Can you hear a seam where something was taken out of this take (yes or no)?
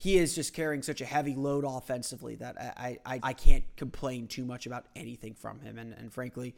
yes